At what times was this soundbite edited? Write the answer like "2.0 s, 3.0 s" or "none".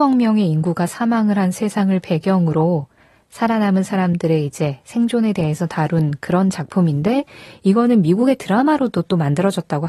none